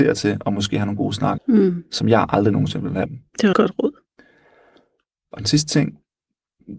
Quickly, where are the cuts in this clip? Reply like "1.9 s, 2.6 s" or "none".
1.4 s, 3.1 s, 3.5 s